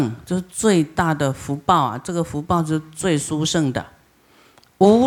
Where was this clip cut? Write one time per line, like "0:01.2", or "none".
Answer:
none